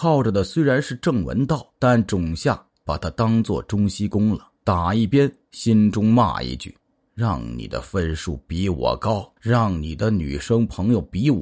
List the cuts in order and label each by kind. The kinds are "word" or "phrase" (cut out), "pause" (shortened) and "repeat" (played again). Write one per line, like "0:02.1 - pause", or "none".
0:01.8 - pause
0:04.6 - pause
0:06.8 - pause
0:09.4 - pause